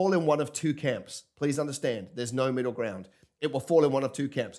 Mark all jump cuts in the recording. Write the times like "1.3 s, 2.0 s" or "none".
none